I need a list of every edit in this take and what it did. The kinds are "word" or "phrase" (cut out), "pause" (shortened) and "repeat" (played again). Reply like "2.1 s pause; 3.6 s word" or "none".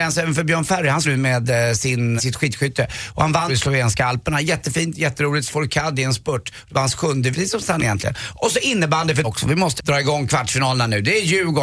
1.0 s word; 2.2 s word; 3.5 s word; 5.5 s word; 7.3 s word; 7.8 s word; 9.2 s word; 9.8 s word